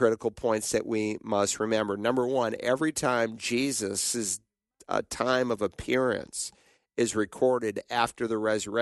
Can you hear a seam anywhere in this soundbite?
no; 0 cuts

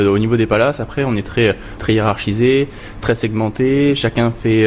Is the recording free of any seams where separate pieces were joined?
yes; 0 cuts

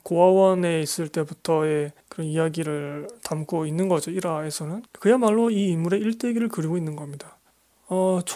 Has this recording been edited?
yes; 2 cuts; at 2.0 s, 4.9 s

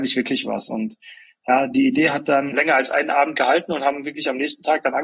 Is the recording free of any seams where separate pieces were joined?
yes; 0 cuts

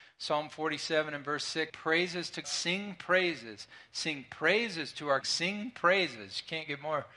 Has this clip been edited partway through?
yes; 3 cuts; at 1.7 s, 2.4 s, 5.2 s

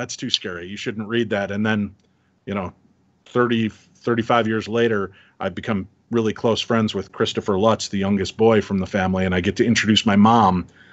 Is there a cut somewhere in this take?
no; 0 cuts

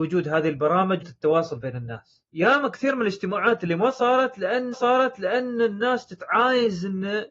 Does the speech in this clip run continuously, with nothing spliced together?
no; 3 cuts; at 1.0 s, 2.3 s, 4.7 s

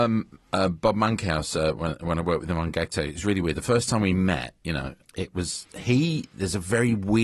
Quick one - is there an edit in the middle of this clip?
yes; 1 cut; at 5.0 s

